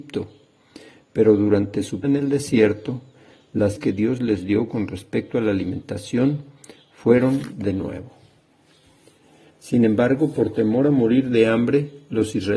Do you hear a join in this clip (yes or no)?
yes